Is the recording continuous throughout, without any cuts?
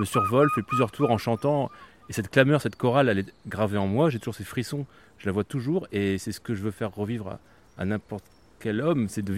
yes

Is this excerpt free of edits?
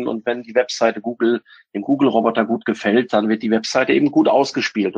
yes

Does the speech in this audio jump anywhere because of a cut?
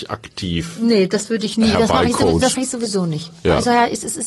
yes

